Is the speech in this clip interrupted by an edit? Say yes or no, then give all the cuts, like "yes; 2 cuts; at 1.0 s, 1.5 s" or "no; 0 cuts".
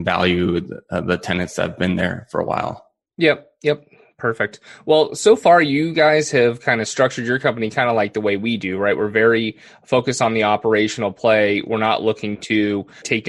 no; 0 cuts